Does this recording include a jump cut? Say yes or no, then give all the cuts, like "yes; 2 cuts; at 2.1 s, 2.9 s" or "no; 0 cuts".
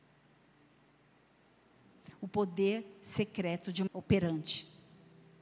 yes; 1 cut; at 3.9 s